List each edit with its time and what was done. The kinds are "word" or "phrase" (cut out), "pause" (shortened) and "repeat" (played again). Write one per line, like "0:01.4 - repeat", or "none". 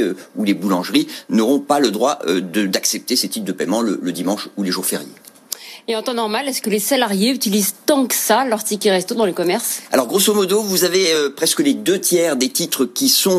none